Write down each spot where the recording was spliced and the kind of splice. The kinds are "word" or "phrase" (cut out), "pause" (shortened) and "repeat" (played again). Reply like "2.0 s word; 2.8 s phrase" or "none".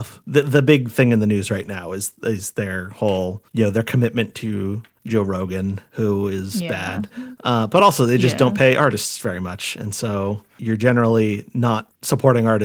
none